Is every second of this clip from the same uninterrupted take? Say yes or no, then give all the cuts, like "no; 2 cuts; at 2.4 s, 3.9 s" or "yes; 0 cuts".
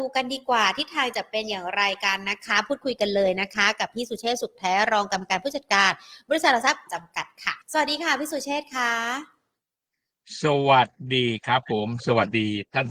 no; 2 cuts; at 6.9 s, 7.6 s